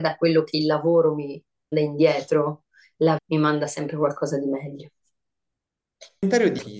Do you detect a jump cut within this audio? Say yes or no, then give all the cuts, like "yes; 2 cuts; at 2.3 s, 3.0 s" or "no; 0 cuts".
yes; 2 cuts; at 1.7 s, 3.2 s